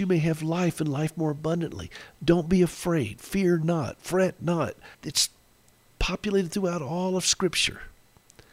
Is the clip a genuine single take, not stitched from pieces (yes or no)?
no